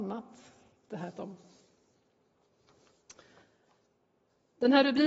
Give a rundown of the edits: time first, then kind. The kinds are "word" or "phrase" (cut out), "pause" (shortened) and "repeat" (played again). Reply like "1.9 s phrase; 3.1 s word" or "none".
1.1 s word